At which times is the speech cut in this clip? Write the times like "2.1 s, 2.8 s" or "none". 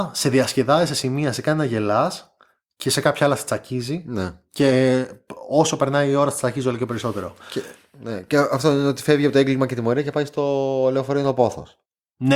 none